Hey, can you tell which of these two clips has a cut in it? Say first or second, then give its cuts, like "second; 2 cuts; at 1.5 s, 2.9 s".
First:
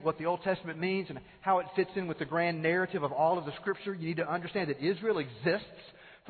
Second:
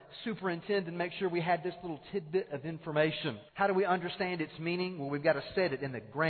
second; 1 cut; at 3.5 s